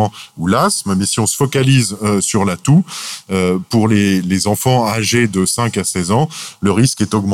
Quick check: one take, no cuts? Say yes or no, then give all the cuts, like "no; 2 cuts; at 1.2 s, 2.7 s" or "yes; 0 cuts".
yes; 0 cuts